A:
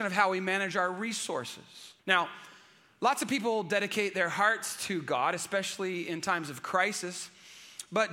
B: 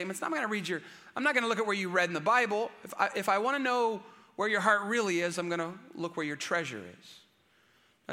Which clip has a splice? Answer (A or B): A